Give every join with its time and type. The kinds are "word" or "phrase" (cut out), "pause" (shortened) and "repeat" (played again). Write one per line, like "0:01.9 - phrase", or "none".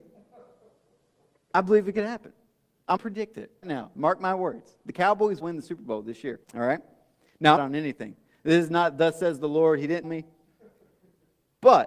0:03.0 - word
0:03.6 - word
0:05.4 - word
0:06.4 - pause
0:07.6 - phrase
0:10.0 - word